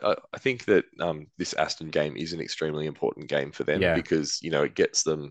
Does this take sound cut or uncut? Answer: cut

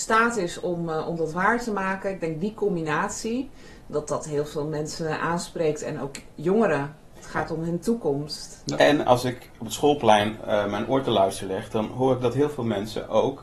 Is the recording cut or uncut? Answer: cut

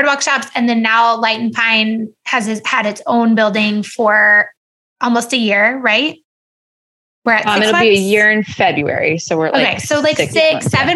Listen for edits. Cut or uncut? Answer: uncut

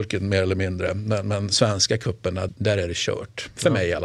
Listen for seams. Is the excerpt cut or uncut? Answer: cut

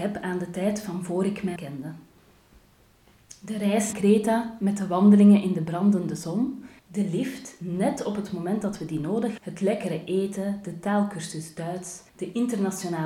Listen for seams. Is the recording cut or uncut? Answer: cut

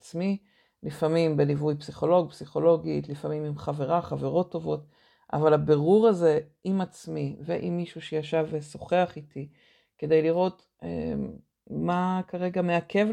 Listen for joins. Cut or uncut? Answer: uncut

